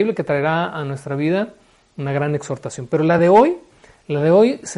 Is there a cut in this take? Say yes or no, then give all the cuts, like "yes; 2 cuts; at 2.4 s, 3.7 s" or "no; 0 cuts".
no; 0 cuts